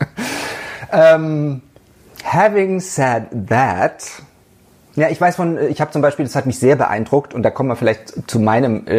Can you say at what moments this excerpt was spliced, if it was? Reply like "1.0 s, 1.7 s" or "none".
none